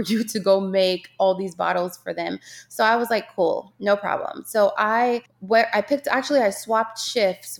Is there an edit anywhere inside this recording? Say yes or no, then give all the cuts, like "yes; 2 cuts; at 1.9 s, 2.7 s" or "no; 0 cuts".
yes; 1 cut; at 5.3 s